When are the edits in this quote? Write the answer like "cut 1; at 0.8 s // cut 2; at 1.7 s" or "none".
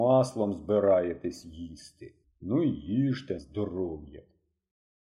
cut 1; at 2.2 s // cut 2; at 3.4 s

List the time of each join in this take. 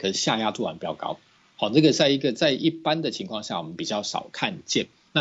cut 1; at 1.4 s

